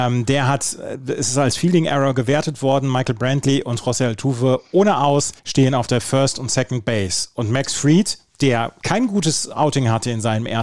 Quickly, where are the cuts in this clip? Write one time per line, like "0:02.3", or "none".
0:05.4